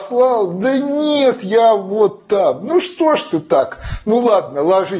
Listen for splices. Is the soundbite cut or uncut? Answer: uncut